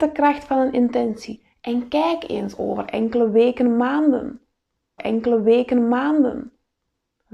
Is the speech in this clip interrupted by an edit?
yes; 1 cut; at 5.0 s

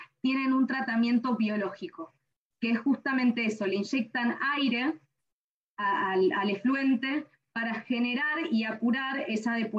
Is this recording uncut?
yes; 0 cuts

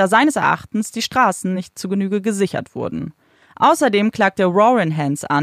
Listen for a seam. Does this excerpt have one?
no; 0 cuts

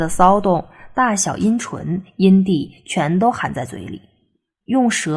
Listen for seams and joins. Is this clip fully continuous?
yes; 0 cuts

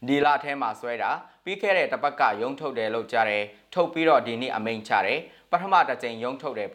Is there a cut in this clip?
no; 0 cuts

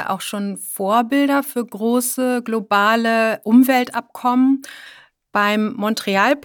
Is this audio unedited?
yes; 0 cuts

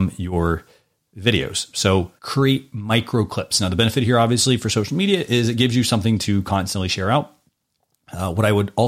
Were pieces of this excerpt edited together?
yes; 1 cut; at 2.2 s

